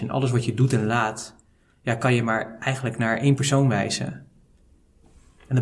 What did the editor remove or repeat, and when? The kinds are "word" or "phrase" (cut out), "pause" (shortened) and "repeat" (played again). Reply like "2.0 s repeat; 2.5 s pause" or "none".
none

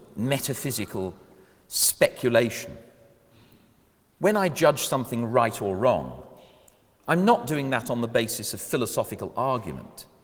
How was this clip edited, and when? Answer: none

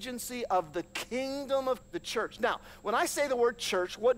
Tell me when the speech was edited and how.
1.8 s word

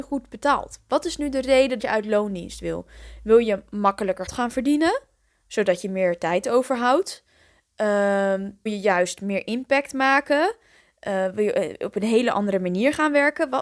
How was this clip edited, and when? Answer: 1.8 s word; 4.3 s word; 8.7 s word

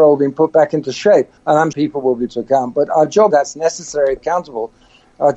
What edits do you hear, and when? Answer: 1.4 s pause; 1.7 s phrase; 2.3 s word; 3.3 s phrase; 4.2 s phrase

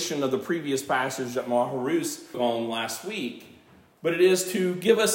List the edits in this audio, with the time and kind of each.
2.3 s word

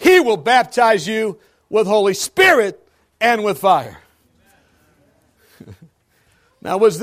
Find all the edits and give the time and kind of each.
none

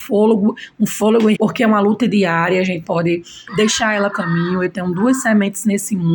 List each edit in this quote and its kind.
1.3 s word; 2.8 s word; 3.5 s word; 4.1 s word

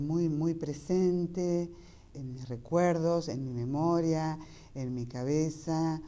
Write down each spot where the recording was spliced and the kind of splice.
2.1 s word

